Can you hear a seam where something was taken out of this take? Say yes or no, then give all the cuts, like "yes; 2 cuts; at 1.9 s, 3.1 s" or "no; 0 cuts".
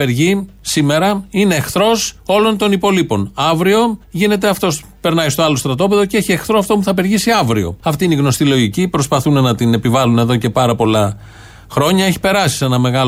yes; 3 cuts; at 2.2 s, 4.0 s, 7.8 s